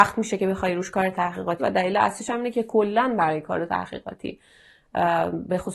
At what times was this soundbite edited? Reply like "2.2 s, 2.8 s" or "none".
1.6 s